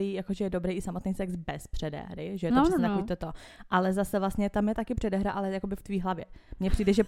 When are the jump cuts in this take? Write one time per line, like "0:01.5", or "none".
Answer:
none